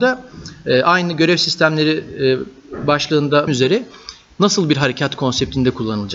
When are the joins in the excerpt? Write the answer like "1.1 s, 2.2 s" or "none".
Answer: 3.5 s